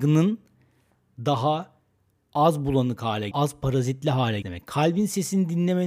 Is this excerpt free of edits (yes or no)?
no